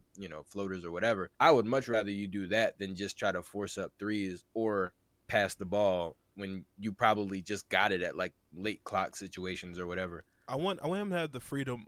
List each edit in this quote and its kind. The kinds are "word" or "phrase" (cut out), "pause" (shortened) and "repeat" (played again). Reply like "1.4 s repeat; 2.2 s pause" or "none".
1.3 s pause; 5.1 s pause; 8.4 s pause